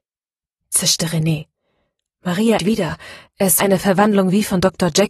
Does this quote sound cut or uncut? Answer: cut